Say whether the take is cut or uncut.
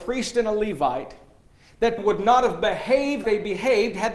cut